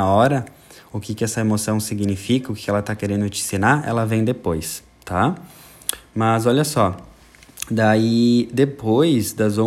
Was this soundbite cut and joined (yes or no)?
no